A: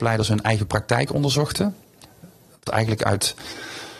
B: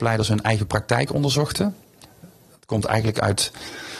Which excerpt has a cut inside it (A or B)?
A